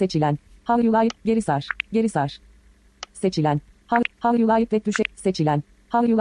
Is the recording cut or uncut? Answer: uncut